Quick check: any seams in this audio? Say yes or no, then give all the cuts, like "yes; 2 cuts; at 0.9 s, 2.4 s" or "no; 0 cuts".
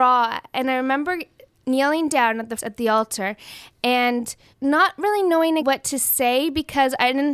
yes; 4 cuts; at 1.6 s, 2.6 s, 4.5 s, 5.6 s